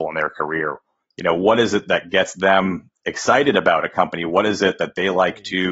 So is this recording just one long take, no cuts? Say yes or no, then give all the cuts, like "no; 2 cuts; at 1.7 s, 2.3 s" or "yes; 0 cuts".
yes; 0 cuts